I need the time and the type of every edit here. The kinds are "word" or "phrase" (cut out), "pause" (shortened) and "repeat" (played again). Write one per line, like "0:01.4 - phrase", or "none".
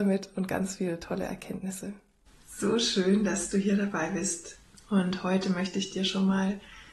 0:02.3 - pause